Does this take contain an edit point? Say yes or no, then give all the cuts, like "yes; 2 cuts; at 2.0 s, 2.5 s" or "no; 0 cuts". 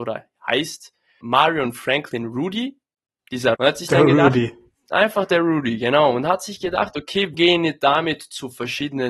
yes; 3 cuts; at 1.2 s, 3.5 s, 7.3 s